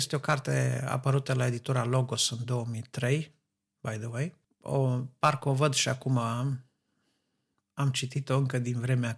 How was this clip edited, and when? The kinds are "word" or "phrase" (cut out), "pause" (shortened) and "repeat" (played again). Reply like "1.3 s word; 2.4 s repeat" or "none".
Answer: none